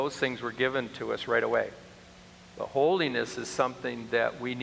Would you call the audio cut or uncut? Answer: uncut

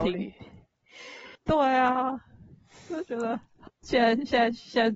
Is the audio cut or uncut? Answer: cut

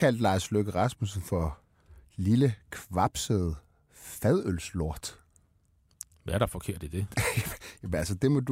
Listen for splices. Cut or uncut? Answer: uncut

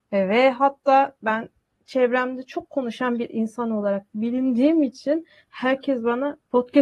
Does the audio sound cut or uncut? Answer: uncut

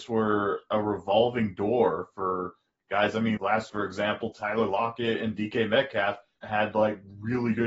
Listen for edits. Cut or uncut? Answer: cut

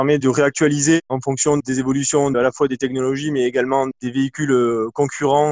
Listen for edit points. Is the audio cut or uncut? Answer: uncut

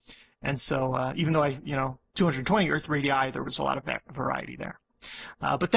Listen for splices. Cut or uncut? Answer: cut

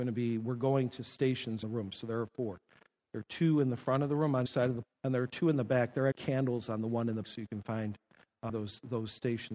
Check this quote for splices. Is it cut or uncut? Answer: cut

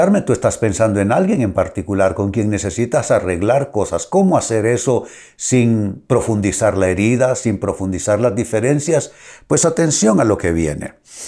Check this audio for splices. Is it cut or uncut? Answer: uncut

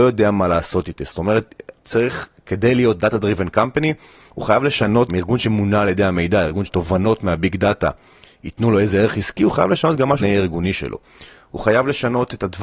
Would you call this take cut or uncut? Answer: cut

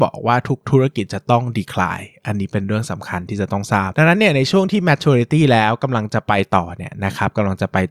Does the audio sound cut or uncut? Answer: uncut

